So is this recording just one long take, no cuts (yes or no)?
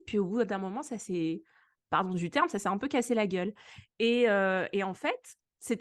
yes